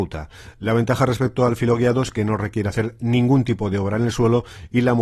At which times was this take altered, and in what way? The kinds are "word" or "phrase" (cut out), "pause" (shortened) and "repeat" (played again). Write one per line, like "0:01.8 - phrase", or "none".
none